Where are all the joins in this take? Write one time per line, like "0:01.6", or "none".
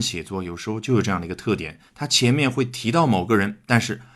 0:01.9